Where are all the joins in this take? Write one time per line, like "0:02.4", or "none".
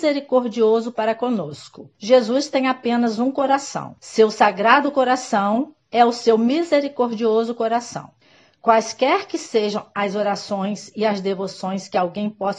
0:01.9
0:04.0
0:08.2